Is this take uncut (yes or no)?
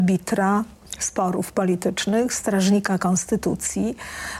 yes